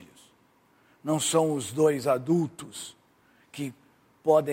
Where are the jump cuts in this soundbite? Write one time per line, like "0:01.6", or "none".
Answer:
none